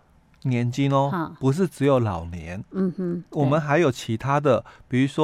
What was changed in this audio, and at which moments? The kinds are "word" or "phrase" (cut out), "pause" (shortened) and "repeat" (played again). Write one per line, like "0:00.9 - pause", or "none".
none